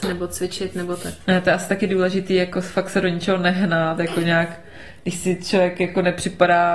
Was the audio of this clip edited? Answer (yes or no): no